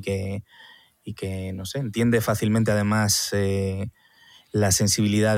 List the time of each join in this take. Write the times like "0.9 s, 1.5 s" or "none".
none